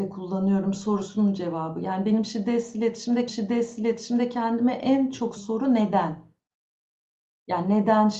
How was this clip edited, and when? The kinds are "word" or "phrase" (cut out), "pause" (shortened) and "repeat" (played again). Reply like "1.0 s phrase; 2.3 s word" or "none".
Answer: 3.3 s repeat; 5.4 s word